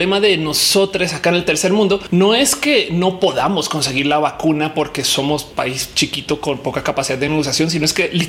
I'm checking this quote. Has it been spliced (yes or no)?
no